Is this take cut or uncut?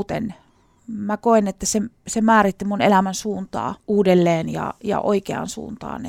cut